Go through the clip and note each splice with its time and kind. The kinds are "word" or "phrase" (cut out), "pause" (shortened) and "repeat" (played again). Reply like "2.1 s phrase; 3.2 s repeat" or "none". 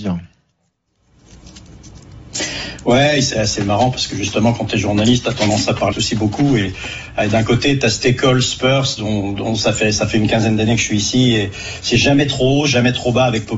3.3 s word; 5.9 s phrase